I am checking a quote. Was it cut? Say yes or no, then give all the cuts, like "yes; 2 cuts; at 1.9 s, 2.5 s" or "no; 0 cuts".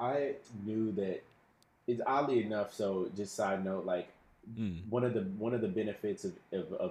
no; 0 cuts